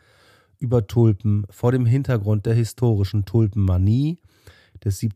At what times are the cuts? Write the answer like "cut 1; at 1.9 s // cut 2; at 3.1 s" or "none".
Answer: none